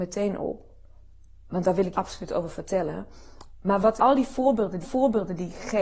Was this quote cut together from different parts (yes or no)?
yes